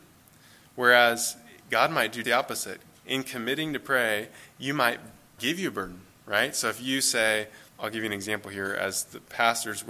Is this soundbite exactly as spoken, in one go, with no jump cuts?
no; 3 cuts; at 2.2 s, 5.4 s, 7.7 s

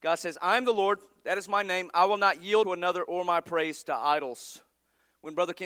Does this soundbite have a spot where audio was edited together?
yes; 1 cut; at 2.6 s

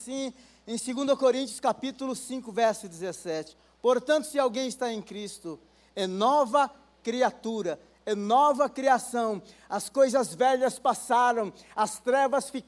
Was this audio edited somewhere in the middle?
no; 0 cuts

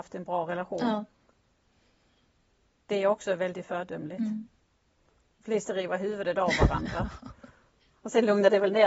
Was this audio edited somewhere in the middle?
no; 0 cuts

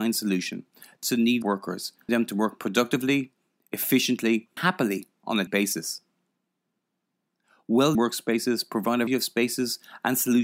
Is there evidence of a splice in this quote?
yes; 7 cuts; at 1.0 s, 1.4 s, 2.1 s, 4.6 s, 5.5 s, 7.9 s, 9.1 s

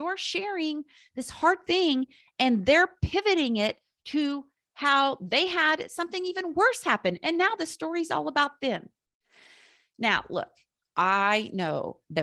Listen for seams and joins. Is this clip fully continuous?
yes; 0 cuts

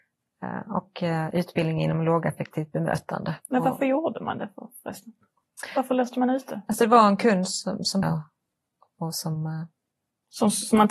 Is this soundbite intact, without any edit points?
no; 2 cuts; at 3.4 s, 8.0 s

